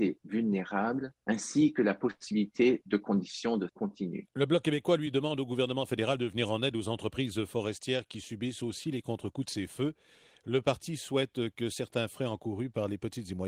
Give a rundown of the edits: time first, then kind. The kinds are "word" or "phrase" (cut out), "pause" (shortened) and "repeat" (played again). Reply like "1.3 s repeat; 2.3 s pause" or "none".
3.7 s word